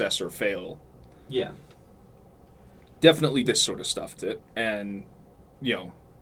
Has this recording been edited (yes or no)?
yes